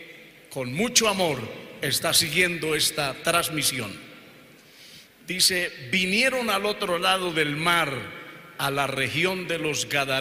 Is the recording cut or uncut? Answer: uncut